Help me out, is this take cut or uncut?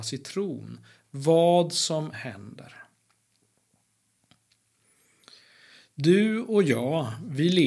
cut